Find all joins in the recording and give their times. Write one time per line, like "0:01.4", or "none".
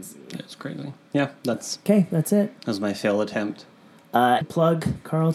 0:04.4